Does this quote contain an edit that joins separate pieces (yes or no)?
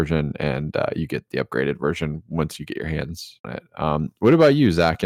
yes